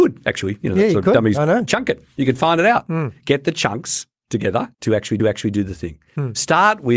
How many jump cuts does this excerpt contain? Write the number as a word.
two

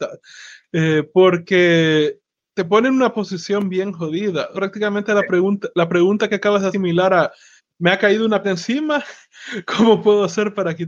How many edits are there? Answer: six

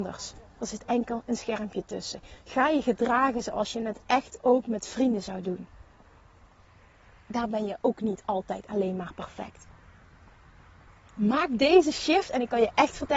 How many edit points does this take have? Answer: zero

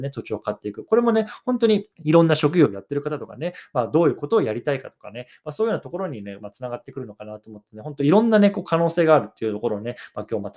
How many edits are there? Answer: one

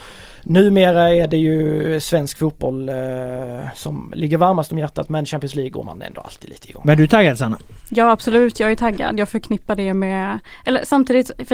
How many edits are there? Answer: zero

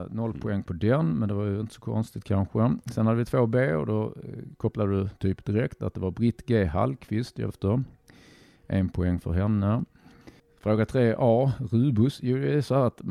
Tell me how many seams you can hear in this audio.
two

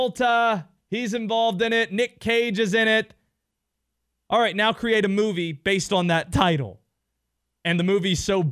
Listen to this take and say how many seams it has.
zero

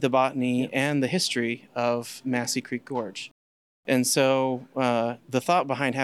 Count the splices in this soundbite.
zero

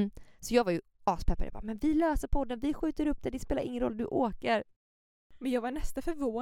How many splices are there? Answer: zero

